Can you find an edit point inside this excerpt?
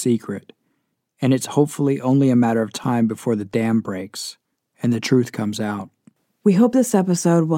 no; 0 cuts

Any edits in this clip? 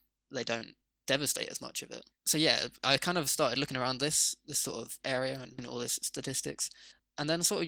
yes; 1 cut; at 2.1 s

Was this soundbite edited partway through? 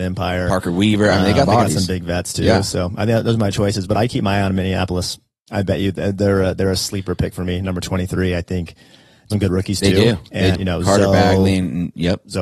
yes; 4 cuts; at 1.5 s, 3.9 s, 9.3 s, 10.5 s

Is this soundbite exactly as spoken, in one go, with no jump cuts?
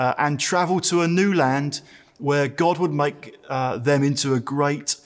yes; 0 cuts

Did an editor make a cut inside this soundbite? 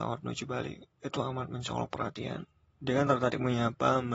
no; 0 cuts

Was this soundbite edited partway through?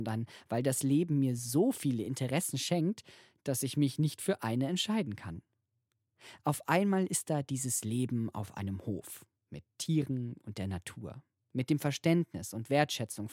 no; 0 cuts

